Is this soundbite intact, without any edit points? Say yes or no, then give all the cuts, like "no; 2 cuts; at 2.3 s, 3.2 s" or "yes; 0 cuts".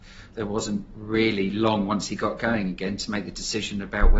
yes; 0 cuts